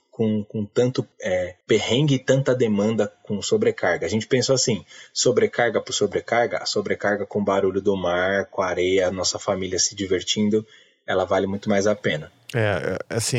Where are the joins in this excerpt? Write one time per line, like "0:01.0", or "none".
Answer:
none